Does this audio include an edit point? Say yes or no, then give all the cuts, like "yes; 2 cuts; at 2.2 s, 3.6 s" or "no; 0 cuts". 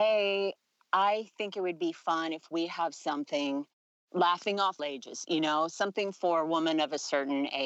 yes; 1 cut; at 4.8 s